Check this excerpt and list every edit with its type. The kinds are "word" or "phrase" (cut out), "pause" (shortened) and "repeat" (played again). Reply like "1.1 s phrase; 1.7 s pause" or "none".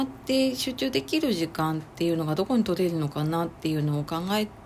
none